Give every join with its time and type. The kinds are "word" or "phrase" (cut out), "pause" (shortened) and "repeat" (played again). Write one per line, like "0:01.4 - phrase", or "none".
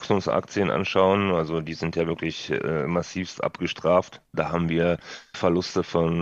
0:04.3 - pause

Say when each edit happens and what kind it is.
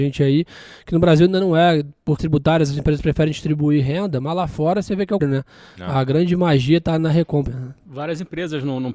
0:02.2 - word
0:05.2 - word
0:07.0 - word
0:07.5 - word

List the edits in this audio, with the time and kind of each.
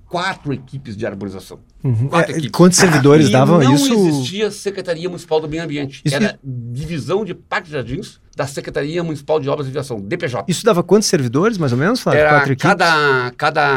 0:01.7 - pause
0:08.3 - pause

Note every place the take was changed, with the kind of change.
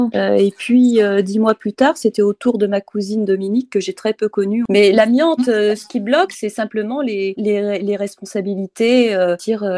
0:07.3 - word

